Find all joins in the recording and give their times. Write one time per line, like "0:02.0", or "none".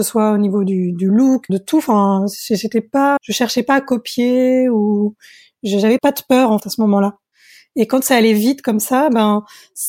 0:01.5
0:03.2
0:06.0
0:06.6

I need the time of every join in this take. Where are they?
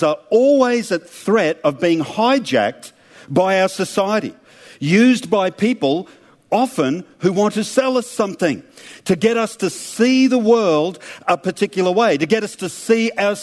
none

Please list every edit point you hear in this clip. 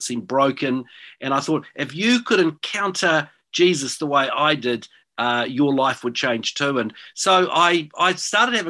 none

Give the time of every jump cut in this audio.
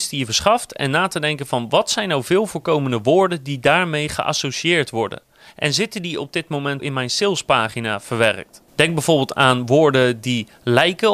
0:06.8

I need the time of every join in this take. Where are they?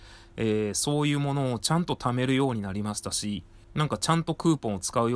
0:03.6

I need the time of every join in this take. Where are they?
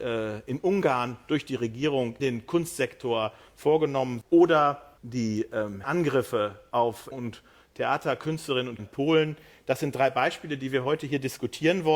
0:02.2
0:04.2
0:05.0
0:05.8
0:07.1
0:08.8

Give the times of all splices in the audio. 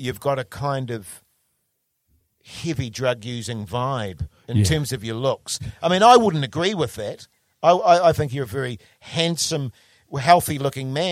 none

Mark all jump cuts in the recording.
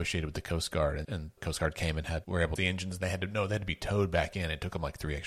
0:01.0
0:01.4
0:02.2
0:02.6

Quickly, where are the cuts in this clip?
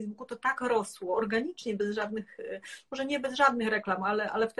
none

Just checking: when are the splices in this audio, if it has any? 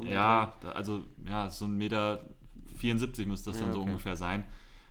none

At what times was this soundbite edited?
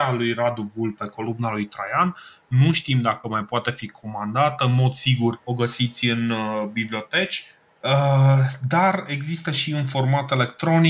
0:05.4

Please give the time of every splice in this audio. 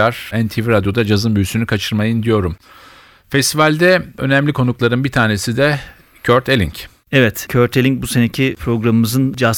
none

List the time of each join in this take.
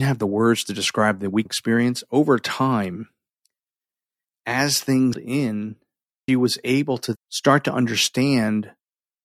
0:01.5
0:05.1
0:06.3
0:07.2

